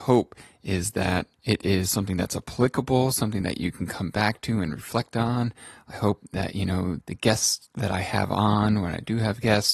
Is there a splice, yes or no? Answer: yes